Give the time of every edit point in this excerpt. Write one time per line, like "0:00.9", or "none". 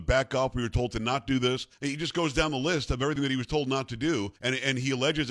0:01.7
0:04.4